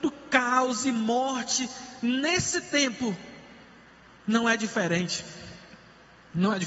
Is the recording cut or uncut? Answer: uncut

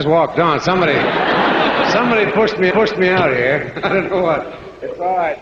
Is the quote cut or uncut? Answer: cut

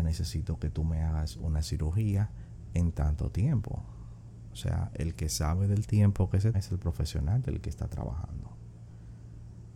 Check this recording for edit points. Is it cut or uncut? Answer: cut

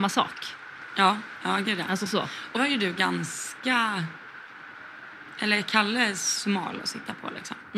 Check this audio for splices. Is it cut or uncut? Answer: cut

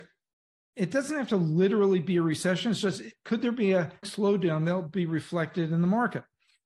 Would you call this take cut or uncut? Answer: cut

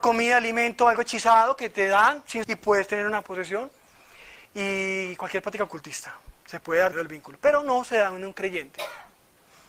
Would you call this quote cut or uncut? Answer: cut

